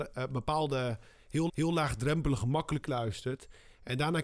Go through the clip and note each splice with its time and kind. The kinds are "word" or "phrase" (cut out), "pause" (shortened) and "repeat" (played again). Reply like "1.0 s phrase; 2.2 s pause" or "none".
1.5 s repeat; 2.8 s word

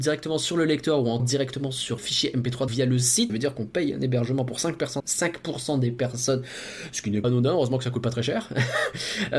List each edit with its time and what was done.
1.2 s word; 2.0 s word; 2.7 s word; 3.3 s word; 5.0 s word; 7.2 s word

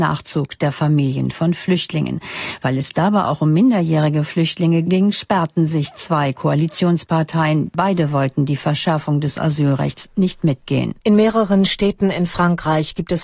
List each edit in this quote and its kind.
11.0 s pause

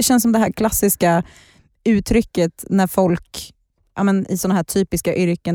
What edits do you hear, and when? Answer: none

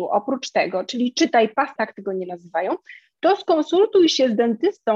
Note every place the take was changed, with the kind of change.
1.8 s phrase

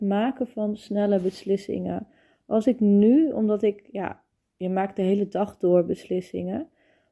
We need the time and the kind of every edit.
none

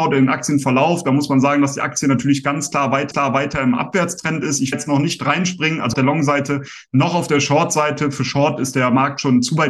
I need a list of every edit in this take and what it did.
3.1 s repeat; 4.7 s phrase; 5.9 s phrase

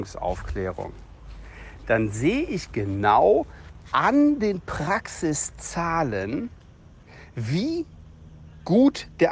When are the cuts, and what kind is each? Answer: none

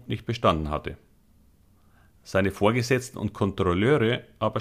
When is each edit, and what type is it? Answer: none

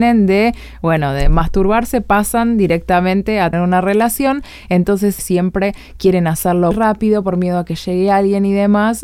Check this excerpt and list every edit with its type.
3.5 s word; 5.2 s phrase; 6.7 s word

